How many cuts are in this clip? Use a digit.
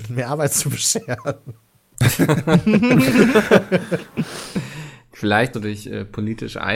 1